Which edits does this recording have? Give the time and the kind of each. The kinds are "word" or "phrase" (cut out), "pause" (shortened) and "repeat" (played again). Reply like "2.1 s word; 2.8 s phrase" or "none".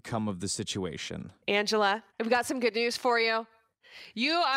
2.1 s pause

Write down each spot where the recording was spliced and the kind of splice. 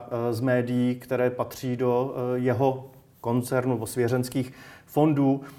none

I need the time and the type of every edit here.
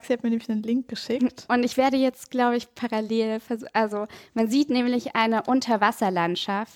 none

